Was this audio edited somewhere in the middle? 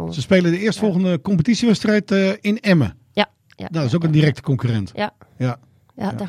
no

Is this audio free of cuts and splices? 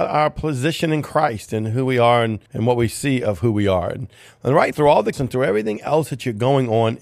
no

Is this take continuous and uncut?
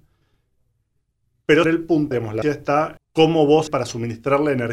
no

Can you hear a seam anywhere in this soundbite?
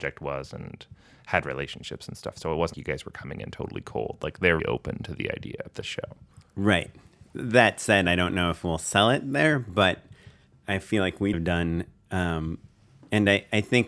yes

